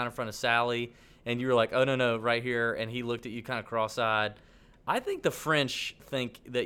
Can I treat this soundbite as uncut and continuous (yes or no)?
yes